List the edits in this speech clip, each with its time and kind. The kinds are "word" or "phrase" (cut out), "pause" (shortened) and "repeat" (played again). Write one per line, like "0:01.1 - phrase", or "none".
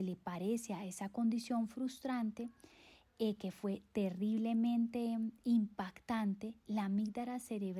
none